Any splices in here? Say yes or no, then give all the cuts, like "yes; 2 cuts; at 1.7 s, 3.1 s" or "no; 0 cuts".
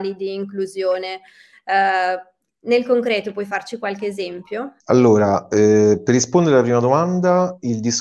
yes; 2 cuts; at 2.4 s, 4.8 s